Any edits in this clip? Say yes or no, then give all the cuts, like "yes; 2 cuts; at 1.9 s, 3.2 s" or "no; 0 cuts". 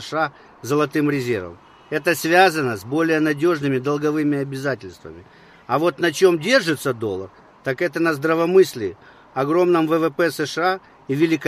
no; 0 cuts